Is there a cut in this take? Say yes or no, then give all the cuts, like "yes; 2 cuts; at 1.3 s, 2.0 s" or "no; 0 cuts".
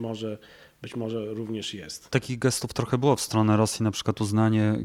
no; 0 cuts